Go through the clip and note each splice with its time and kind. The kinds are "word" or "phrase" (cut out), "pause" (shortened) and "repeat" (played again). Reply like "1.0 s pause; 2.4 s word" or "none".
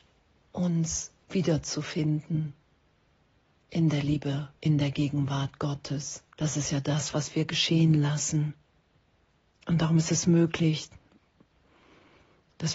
1.2 s pause; 6.3 s pause; 9.2 s pause